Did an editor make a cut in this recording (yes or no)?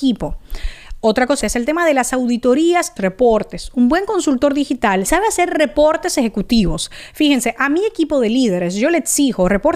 yes